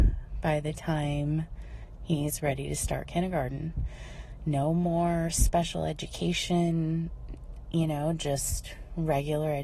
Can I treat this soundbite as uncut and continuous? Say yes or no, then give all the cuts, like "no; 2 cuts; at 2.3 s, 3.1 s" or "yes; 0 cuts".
yes; 0 cuts